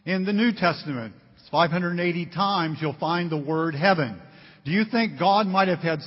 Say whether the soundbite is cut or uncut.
uncut